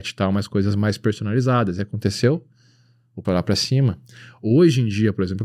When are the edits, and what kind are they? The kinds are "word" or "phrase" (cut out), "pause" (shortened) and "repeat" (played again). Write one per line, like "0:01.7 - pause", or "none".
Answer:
0:03.2 - word